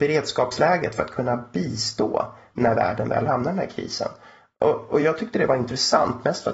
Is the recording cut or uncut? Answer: uncut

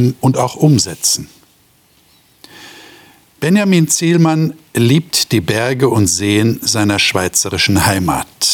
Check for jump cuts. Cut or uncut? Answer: uncut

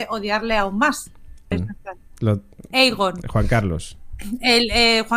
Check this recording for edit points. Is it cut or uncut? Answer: cut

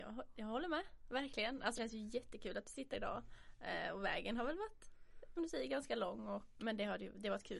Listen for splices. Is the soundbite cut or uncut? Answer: cut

